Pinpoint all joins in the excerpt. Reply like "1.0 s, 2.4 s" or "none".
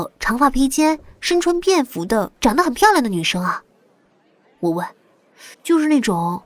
2.4 s, 5.5 s